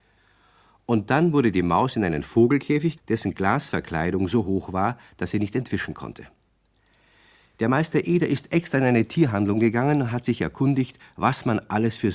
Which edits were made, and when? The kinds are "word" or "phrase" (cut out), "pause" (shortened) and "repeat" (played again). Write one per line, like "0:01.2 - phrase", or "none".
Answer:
0:03.0 - word

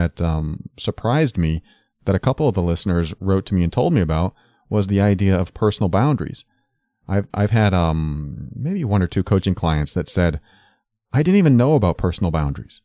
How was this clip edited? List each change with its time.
none

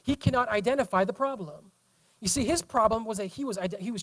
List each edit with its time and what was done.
none

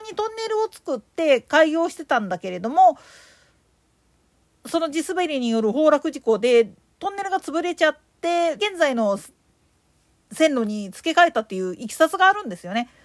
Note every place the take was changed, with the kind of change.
0:08.6 - word

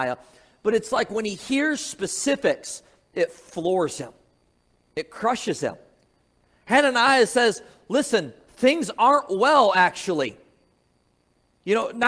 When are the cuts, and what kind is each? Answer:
none

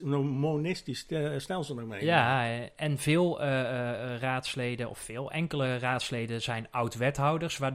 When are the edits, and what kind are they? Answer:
none

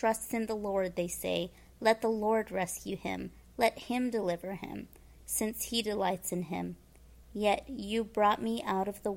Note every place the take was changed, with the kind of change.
none

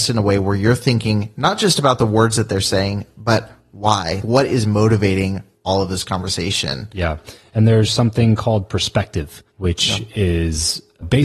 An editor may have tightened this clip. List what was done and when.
0:09.5 - pause

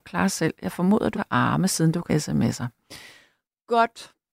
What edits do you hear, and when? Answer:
0:01.2 - word
0:02.1 - word

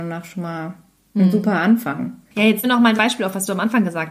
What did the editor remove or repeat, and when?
0:02.6 - word
0:03.0 - word

